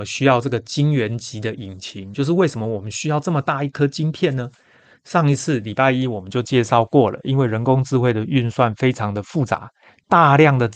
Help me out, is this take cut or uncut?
uncut